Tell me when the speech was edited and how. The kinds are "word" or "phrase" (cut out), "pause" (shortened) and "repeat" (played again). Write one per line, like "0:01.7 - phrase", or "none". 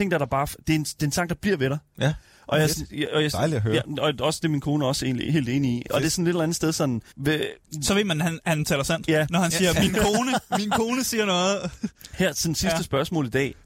0:07.1 - pause